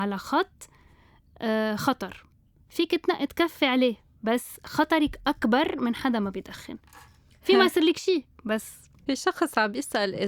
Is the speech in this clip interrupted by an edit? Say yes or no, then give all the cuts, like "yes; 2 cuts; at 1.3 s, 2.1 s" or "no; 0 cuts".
no; 0 cuts